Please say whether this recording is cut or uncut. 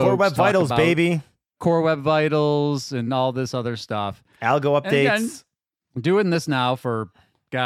uncut